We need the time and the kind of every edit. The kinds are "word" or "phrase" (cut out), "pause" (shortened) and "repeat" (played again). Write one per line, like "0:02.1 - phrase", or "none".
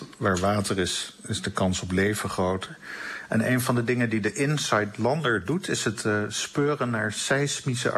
none